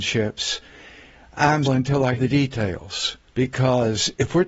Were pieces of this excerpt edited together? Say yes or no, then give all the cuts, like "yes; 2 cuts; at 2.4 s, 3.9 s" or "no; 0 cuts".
yes; 3 cuts; at 1.7 s, 2.2 s, 3.3 s